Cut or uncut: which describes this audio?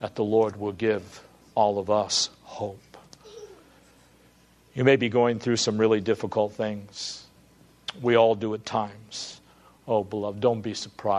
uncut